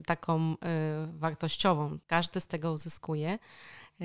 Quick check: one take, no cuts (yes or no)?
no